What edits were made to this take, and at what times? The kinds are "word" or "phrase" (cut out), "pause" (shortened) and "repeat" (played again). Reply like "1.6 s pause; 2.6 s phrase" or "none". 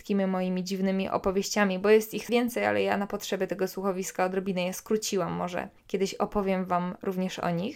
2.3 s word; 5.8 s pause